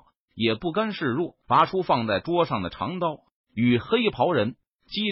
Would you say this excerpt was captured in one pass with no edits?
no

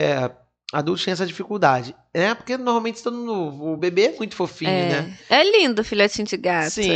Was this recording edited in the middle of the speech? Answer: no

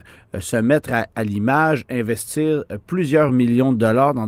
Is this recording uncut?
yes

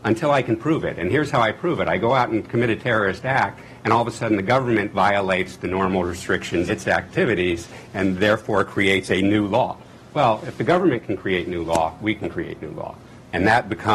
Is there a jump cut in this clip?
yes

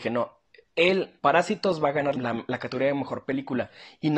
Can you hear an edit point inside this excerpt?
yes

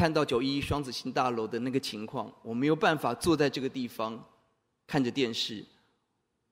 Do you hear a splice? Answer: no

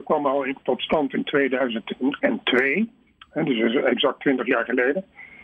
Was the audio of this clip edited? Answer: no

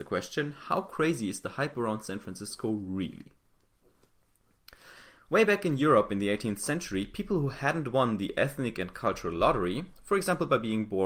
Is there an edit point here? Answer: no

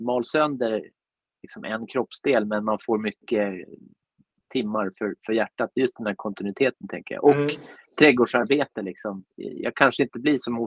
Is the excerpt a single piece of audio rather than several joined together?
yes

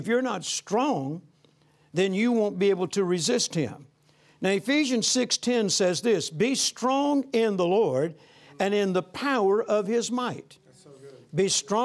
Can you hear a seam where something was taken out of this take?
no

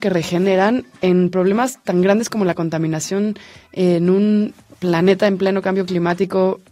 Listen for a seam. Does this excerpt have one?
no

